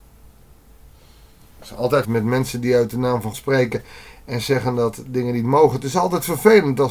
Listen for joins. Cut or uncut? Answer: cut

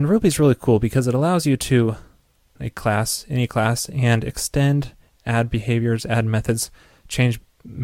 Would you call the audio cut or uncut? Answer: cut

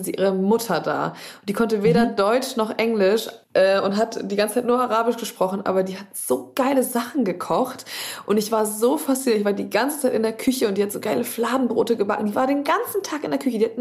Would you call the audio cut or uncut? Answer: cut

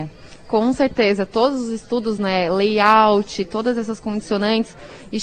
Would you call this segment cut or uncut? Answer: uncut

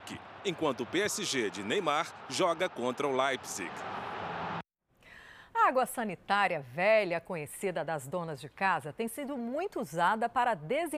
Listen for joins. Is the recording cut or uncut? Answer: uncut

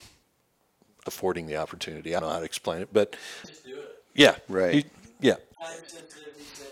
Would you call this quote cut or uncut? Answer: cut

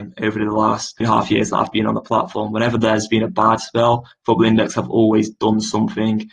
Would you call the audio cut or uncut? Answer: cut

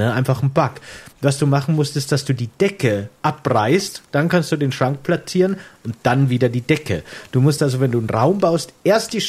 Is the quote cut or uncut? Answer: uncut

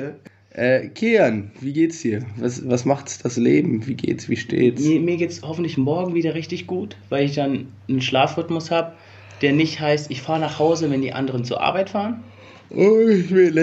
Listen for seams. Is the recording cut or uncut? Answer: uncut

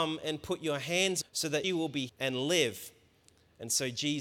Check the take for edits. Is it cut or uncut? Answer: cut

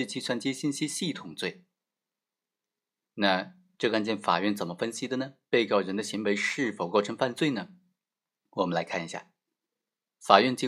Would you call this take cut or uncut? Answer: uncut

